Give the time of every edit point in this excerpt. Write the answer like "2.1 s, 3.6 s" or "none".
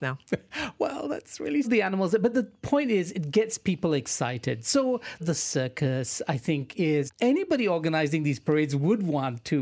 1.6 s, 5.2 s, 7.1 s